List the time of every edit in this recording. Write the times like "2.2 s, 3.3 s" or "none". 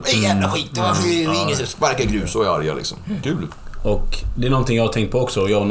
3.2 s

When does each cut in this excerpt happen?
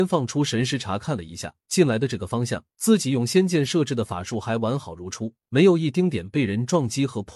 1.6 s, 2.7 s, 5.4 s

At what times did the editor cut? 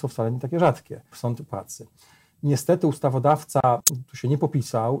1.1 s, 1.5 s

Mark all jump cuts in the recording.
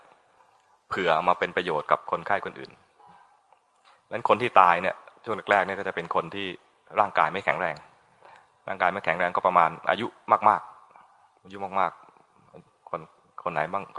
none

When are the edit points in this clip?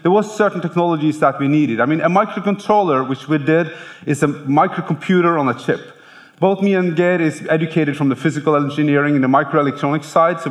none

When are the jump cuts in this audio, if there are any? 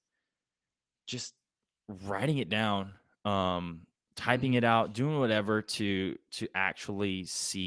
none

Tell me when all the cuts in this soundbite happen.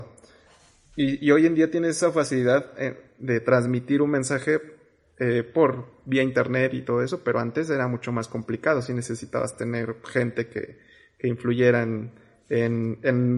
none

